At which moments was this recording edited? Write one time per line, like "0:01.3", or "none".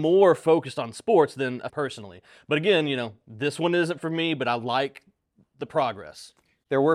0:01.7

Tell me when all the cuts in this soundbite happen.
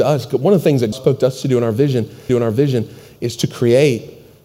0:00.9
0:02.3

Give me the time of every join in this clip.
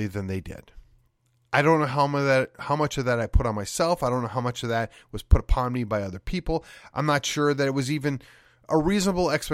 none

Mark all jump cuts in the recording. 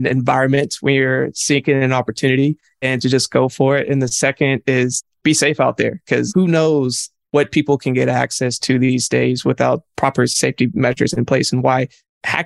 none

